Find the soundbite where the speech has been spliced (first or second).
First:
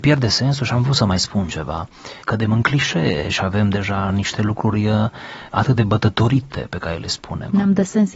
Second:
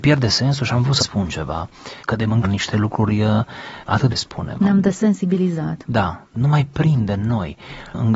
second